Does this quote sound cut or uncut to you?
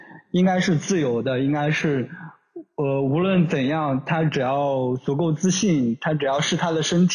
uncut